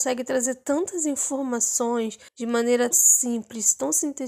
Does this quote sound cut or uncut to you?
cut